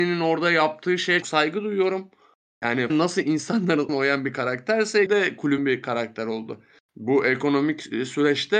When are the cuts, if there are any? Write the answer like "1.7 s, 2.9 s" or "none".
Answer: 1.2 s, 2.9 s, 3.9 s, 5.1 s, 5.6 s